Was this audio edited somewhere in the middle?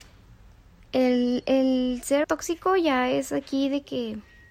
yes; 1 cut; at 2.2 s

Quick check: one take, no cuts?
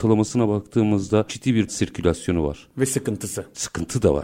no; 2 cuts; at 1.3 s, 1.7 s

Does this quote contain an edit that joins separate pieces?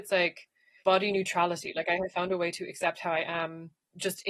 no; 0 cuts

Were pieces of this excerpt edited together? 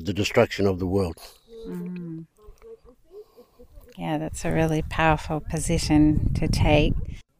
no; 0 cuts

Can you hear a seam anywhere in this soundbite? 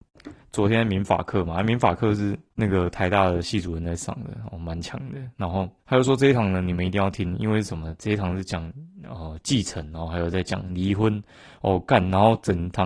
yes; 2 cuts; at 2.5 s, 5.8 s

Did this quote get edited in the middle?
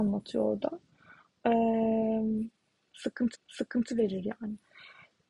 yes; 1 cut; at 3.3 s

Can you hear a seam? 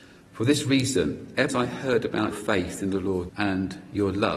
yes; 3 cuts; at 1.5 s, 2.3 s, 3.3 s

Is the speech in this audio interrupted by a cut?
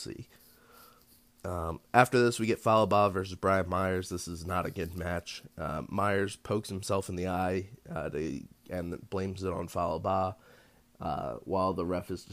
no; 0 cuts

